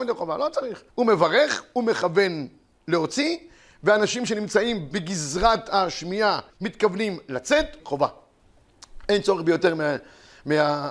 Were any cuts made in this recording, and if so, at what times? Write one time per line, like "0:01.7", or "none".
0:00.9
0:06.5
0:07.8